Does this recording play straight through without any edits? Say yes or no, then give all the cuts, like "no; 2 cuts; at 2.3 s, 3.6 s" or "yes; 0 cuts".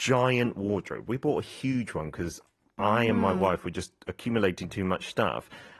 yes; 0 cuts